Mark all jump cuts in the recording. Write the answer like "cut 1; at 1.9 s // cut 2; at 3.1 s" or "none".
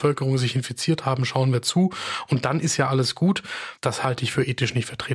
none